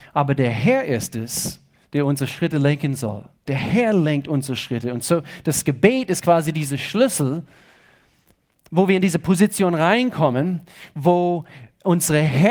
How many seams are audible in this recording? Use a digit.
1